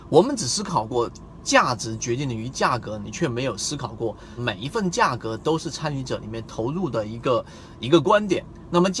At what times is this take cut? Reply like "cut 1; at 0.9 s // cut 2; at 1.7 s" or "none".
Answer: cut 1; at 4.4 s